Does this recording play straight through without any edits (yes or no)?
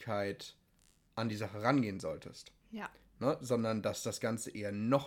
yes